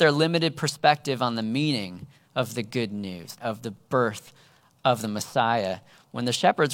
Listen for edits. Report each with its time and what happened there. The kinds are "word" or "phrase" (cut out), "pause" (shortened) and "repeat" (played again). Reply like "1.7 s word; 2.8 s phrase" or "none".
3.4 s word